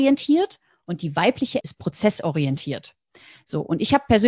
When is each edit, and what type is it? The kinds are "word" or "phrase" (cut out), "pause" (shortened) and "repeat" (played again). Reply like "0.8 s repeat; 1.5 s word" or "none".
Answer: 1.6 s word